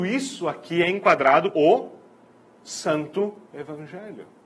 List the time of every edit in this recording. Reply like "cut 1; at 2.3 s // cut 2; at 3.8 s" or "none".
cut 1; at 1.5 s // cut 2; at 3.4 s